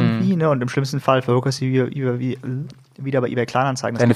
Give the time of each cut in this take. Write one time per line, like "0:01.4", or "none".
none